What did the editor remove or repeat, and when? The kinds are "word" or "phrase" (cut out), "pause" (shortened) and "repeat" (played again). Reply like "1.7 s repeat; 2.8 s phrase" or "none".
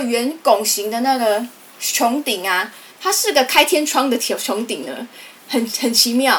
1.6 s pause; 2.9 s pause